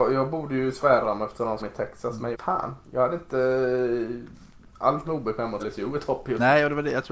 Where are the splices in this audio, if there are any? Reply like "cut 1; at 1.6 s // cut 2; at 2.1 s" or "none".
cut 1; at 1.0 s // cut 2; at 1.6 s // cut 3; at 2.3 s // cut 4; at 5.0 s // cut 5; at 5.6 s